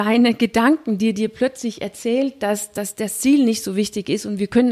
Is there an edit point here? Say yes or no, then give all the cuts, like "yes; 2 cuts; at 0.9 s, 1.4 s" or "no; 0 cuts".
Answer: no; 0 cuts